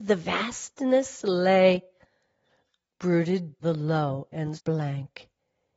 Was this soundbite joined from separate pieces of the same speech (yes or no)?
yes